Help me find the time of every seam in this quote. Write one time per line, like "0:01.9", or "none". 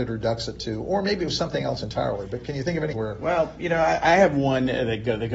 0:02.9